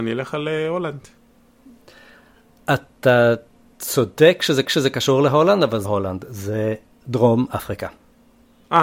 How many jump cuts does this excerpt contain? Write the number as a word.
two